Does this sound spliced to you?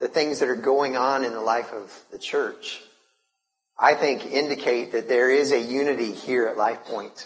no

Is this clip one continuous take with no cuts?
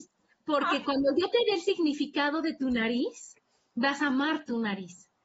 yes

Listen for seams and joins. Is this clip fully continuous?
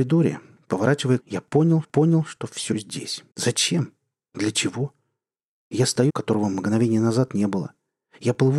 no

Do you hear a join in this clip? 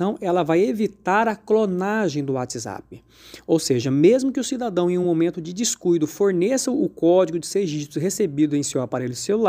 no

